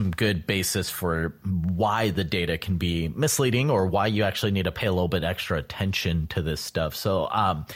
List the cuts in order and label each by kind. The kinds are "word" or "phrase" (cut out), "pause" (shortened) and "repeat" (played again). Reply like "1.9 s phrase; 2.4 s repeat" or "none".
none